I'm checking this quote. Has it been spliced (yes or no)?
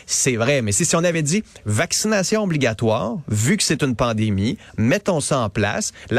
no